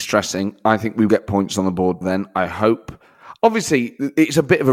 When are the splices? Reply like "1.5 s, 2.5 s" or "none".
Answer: 1.1 s, 2.0 s